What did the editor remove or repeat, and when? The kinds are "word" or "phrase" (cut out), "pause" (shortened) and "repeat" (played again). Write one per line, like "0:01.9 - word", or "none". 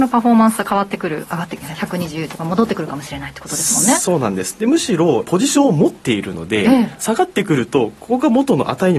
0:05.2 - word